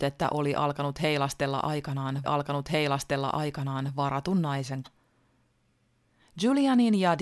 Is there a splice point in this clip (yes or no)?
yes